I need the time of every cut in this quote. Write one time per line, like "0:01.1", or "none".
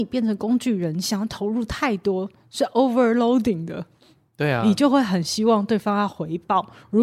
none